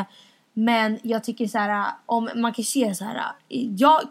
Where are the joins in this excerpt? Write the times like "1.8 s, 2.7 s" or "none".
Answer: none